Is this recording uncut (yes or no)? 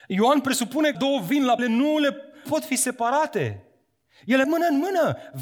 no